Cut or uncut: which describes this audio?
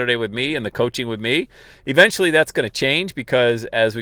uncut